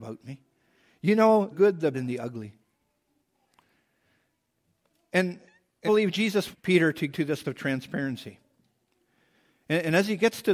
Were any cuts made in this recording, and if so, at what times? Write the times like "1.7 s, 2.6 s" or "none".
1.5 s, 1.9 s, 5.9 s, 6.5 s, 7.1 s, 7.4 s